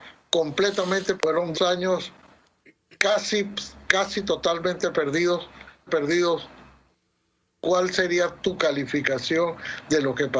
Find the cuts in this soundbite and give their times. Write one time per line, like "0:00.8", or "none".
0:01.2
0:01.5
0:03.9
0:05.9

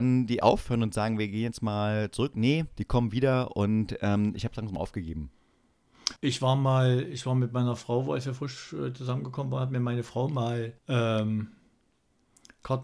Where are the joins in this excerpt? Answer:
0:02.7
0:06.2
0:10.8

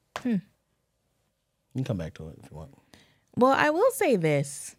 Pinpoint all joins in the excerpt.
none

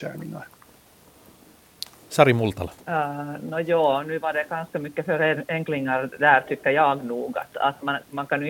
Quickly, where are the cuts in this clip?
0:02.8

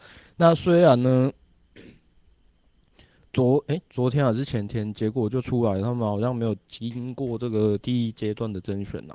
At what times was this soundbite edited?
none

